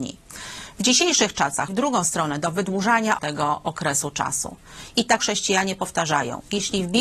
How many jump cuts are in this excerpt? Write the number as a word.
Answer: three